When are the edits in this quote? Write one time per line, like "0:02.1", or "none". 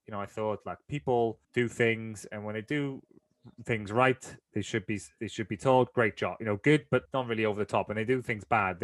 0:01.4
0:07.1